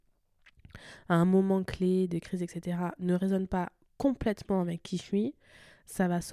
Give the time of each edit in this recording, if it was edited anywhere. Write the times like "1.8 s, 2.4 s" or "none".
none